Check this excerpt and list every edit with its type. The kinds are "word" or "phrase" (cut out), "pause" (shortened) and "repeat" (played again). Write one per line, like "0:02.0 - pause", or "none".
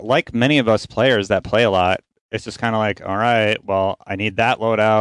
none

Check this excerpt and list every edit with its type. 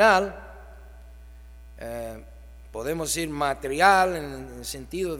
none

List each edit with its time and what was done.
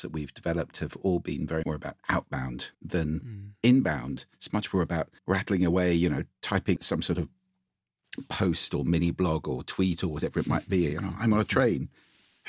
0:01.6 - word
0:02.7 - pause
0:04.3 - pause
0:05.2 - pause
0:06.8 - word

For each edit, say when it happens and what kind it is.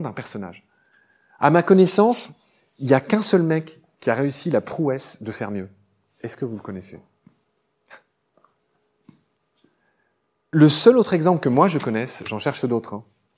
none

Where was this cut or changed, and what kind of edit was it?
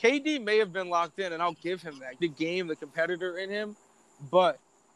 0:02.2 - word

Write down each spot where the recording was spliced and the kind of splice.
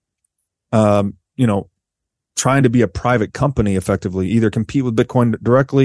none

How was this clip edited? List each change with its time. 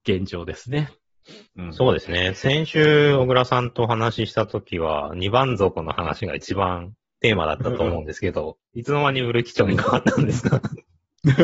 0:01.5 - pause
0:07.0 - pause

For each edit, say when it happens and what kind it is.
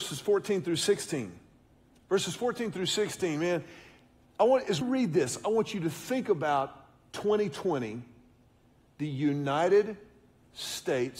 0:04.8 - word

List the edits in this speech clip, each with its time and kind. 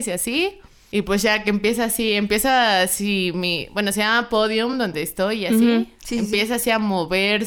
none

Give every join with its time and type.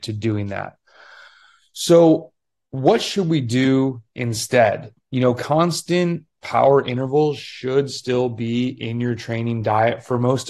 none

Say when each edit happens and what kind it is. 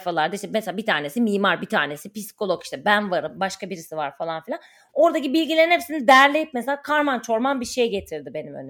none

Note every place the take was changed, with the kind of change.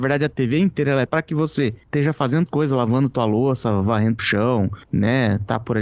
0:01.1 - word
0:02.5 - word
0:04.2 - word

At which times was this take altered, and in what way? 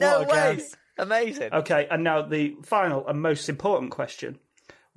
none

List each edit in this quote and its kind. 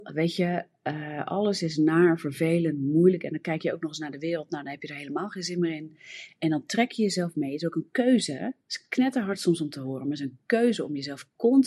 0:08.6 - pause

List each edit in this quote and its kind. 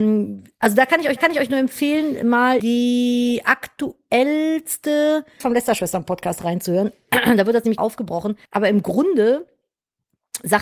0:01.2 - repeat
0:02.6 - word
0:05.4 - word
0:07.8 - word
0:08.5 - pause

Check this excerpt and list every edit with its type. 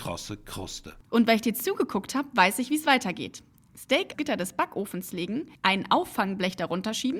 0:01.0 - pause
0:04.1 - phrase
0:05.6 - pause

